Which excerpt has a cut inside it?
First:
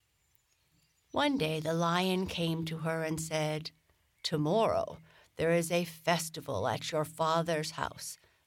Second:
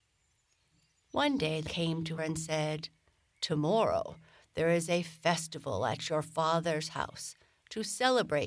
second; 2 cuts; at 1.7 s, 2.2 s

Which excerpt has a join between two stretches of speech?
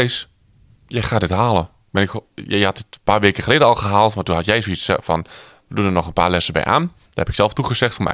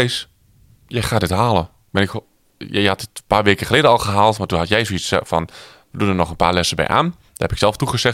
first; 1 cut; at 2.3 s

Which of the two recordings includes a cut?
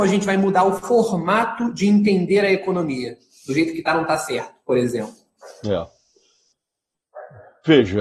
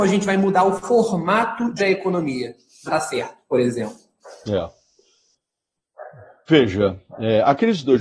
second; 2 cuts; at 1.8 s, 2.9 s

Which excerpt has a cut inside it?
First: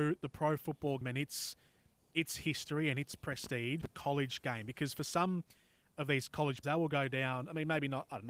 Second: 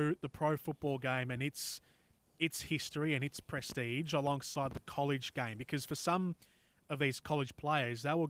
first; 3 cuts; at 1.0 s, 3.8 s, 6.6 s

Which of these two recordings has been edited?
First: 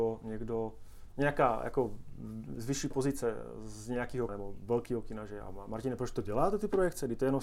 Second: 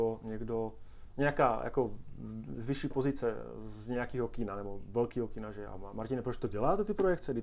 first; 1 cut; at 4.3 s

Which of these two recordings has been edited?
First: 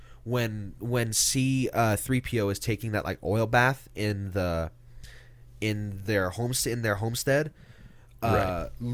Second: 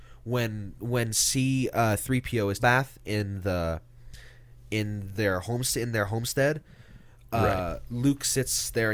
second; 1 cut; at 2.6 s

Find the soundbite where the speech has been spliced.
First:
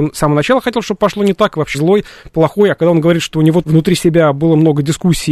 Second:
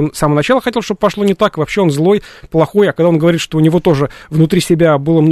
first; 2 cuts; at 1.7 s, 3.6 s

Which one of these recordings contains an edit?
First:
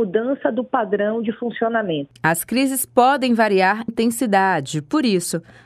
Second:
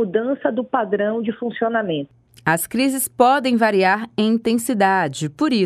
first; 2 cuts; at 2.2 s, 3.9 s

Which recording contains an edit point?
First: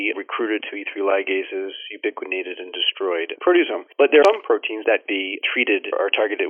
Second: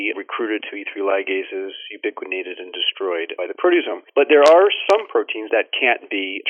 first; 3 cuts; at 3.3 s, 4.2 s, 5.0 s

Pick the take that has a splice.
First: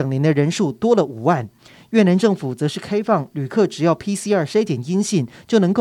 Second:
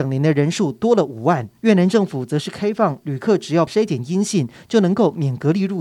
second; 2 cuts; at 1.6 s, 3.7 s

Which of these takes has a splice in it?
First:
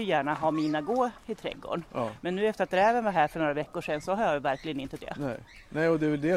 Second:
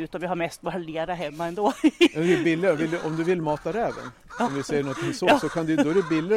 first; 1 cut; at 5.0 s

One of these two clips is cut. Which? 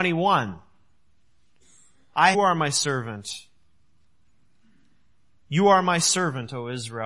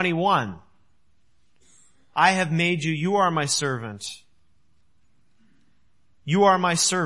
first; 1 cut; at 2.3 s

